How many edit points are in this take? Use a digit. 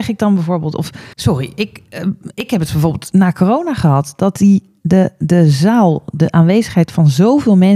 1